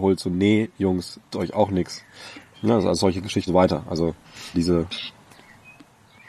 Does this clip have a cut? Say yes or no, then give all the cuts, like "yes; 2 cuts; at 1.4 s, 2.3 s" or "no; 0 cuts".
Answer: yes; 4 cuts; at 1.3 s, 2.5 s, 3.5 s, 4.5 s